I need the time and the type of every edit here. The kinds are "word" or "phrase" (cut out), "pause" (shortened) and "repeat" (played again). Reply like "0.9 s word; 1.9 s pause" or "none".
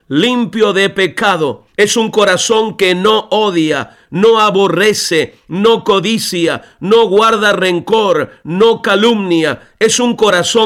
1.7 s pause